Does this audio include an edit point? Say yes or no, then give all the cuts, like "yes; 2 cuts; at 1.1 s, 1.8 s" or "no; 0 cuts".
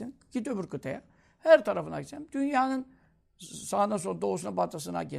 no; 0 cuts